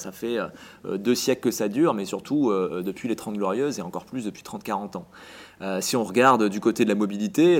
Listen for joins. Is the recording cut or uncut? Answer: uncut